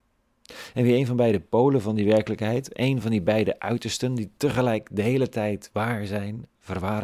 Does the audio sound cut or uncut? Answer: uncut